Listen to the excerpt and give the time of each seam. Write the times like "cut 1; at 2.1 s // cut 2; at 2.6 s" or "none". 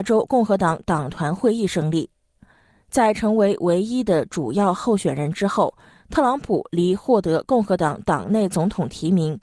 none